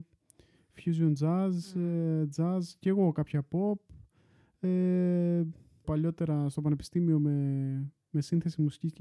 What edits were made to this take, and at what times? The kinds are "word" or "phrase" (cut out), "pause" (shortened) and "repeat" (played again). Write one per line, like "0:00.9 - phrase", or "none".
0:05.8 - phrase